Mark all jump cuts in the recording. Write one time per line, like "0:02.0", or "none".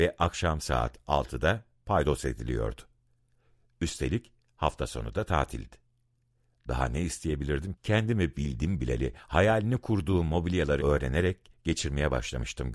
0:07.7
0:10.8